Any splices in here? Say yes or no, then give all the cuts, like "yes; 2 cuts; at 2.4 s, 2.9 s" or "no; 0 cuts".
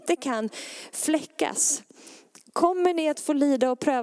yes; 1 cut; at 2.5 s